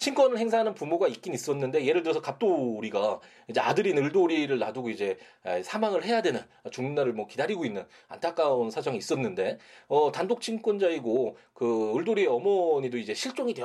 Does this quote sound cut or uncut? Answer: uncut